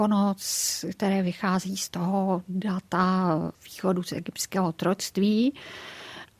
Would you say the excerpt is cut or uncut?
uncut